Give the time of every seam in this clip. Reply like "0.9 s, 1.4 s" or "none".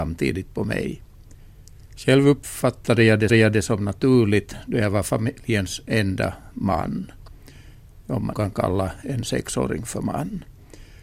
3.3 s, 8.3 s